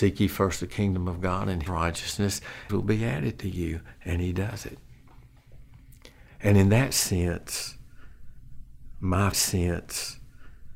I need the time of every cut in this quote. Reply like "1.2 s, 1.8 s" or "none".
1.7 s, 2.7 s, 9.3 s